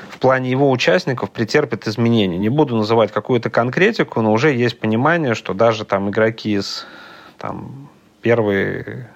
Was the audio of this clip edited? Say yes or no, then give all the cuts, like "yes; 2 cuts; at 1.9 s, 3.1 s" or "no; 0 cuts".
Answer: no; 0 cuts